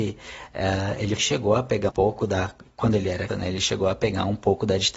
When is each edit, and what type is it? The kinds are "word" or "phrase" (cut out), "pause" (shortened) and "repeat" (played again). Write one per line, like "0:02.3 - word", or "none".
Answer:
0:01.2 - word
0:01.9 - word
0:03.3 - word